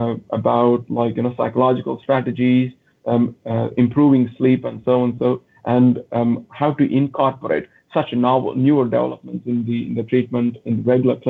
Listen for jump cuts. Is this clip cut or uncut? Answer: uncut